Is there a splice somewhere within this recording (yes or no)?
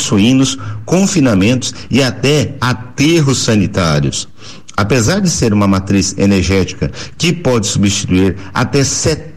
no